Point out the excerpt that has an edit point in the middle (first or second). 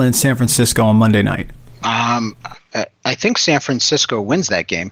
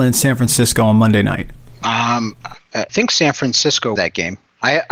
second